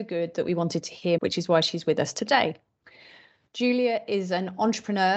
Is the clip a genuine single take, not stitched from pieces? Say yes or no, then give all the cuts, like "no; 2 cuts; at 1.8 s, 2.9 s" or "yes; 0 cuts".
no; 1 cut; at 1.2 s